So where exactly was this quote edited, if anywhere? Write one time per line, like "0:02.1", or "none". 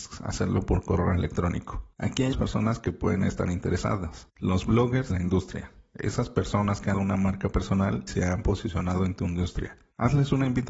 0:02.3
0:05.1
0:06.9
0:08.1